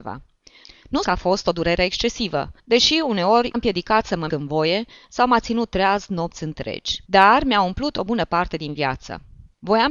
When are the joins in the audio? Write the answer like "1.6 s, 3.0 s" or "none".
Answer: 1.0 s, 2.6 s, 3.5 s, 4.3 s, 7.0 s